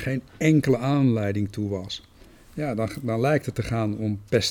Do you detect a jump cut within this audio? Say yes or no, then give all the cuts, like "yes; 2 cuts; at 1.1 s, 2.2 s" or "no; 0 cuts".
no; 0 cuts